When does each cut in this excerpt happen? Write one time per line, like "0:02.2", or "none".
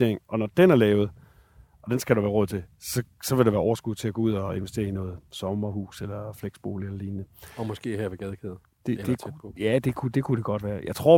none